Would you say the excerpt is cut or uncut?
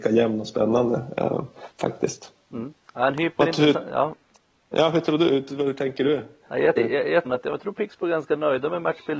cut